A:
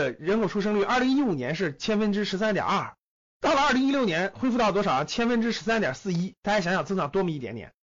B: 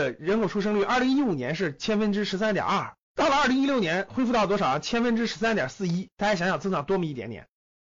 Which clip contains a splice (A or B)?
B